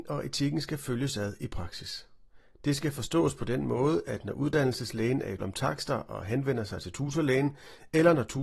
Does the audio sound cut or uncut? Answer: cut